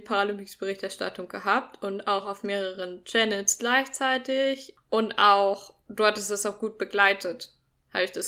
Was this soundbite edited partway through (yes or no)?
no